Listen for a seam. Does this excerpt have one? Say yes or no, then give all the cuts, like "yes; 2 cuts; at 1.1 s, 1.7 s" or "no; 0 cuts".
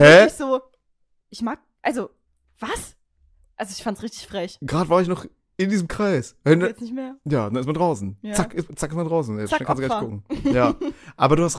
no; 0 cuts